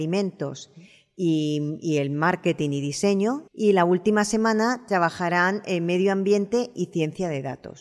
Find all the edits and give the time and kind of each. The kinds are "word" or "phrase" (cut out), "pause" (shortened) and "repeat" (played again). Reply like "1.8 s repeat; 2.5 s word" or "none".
3.5 s pause

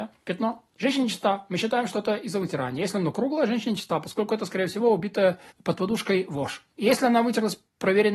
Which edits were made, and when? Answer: 5.5 s pause; 6.7 s pause

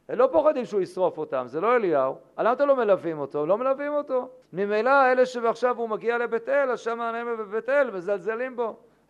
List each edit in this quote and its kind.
4.4 s pause

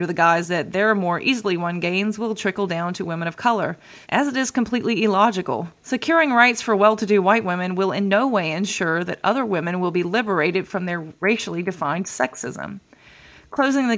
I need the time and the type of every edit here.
4.0 s pause; 5.8 s pause

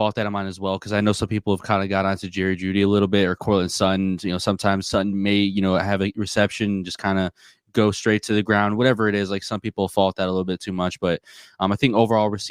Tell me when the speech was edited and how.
none

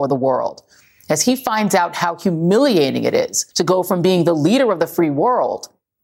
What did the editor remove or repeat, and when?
3.5 s pause

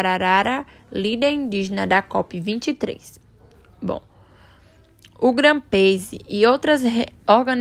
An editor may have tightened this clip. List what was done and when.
none

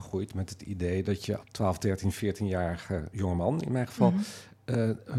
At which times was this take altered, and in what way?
1.4 s word; 3.1 s word

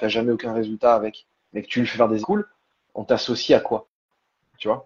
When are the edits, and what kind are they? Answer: 2.2 s word

